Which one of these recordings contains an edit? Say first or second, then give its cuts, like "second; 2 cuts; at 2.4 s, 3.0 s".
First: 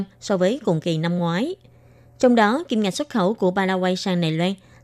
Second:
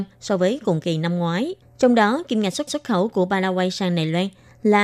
second; 2 cuts; at 1.6 s, 2.7 s